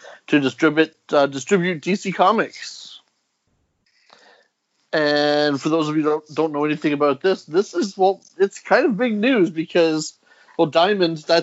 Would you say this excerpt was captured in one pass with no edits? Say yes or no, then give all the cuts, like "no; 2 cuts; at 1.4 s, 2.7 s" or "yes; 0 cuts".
yes; 0 cuts